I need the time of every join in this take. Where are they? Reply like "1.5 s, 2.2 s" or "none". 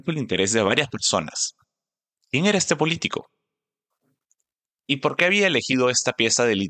none